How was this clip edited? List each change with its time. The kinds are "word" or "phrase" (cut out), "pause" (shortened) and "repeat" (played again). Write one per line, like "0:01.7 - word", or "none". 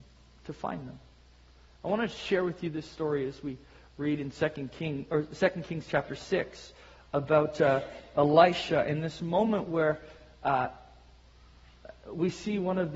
none